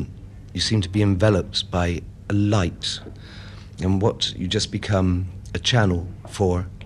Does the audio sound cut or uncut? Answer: uncut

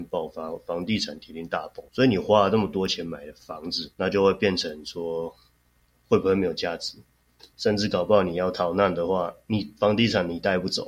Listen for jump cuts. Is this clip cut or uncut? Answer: cut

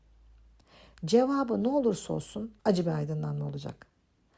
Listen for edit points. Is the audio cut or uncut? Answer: cut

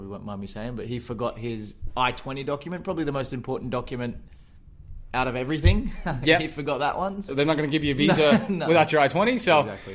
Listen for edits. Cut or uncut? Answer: cut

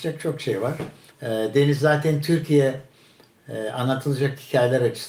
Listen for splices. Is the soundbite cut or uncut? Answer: cut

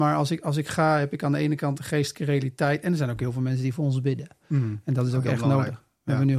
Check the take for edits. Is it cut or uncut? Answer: uncut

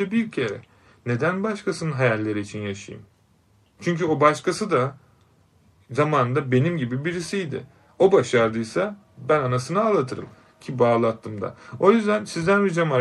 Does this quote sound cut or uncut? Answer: uncut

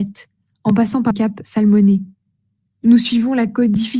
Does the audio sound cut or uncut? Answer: cut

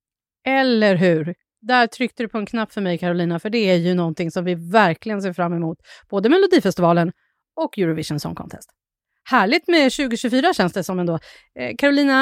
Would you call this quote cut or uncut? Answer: uncut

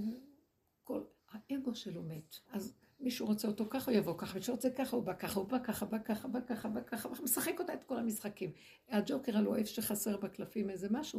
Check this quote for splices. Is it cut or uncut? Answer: cut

